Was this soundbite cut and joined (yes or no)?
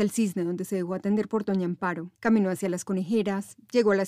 yes